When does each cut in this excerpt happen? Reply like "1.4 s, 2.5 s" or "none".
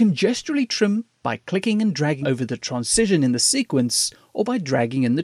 2.2 s